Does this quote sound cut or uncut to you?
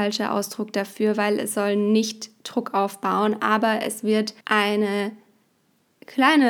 cut